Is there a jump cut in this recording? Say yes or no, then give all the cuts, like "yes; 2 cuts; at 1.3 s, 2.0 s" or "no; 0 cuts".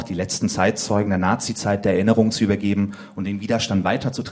no; 0 cuts